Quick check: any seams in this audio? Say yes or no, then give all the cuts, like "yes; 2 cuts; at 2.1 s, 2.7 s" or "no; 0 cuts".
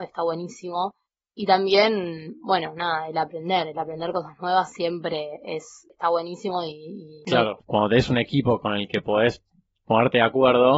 no; 0 cuts